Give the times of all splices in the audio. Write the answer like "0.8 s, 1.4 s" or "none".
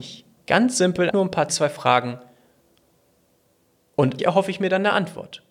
1.1 s, 1.5 s, 4.2 s